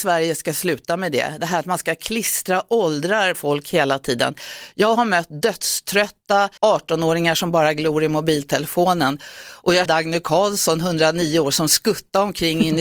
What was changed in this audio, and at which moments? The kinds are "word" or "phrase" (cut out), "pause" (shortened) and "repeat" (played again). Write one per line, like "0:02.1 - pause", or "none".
0:03.3 - word
0:06.6 - pause
0:09.8 - word